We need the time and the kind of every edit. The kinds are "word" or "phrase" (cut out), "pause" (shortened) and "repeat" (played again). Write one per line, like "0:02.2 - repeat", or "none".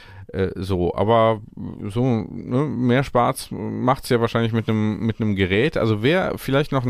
none